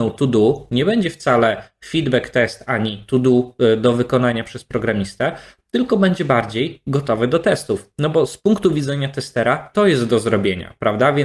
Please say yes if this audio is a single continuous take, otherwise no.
yes